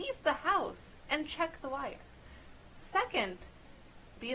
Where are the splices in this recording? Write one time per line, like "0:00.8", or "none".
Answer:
none